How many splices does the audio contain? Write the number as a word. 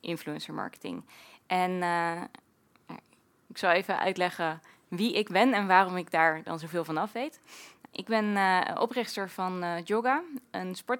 zero